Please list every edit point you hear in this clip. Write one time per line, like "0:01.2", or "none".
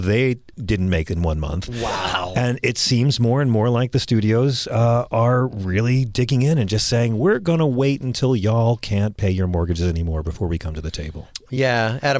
none